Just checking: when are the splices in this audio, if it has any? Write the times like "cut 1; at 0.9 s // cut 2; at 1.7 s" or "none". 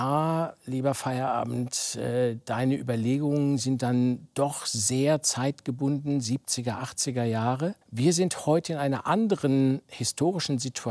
cut 1; at 7.8 s